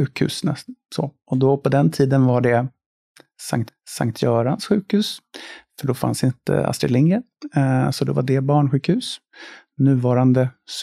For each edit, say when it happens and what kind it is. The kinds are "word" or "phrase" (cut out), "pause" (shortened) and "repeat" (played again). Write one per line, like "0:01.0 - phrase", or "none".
0:03.7 - repeat